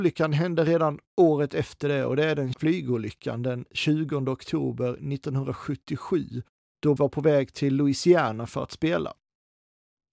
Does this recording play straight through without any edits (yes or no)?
no